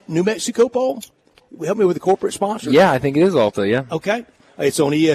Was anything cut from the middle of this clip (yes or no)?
no